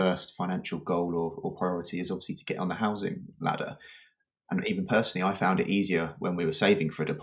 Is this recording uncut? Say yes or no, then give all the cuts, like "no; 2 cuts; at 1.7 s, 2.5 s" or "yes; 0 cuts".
yes; 0 cuts